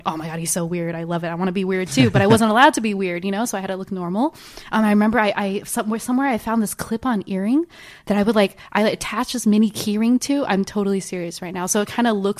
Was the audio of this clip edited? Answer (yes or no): no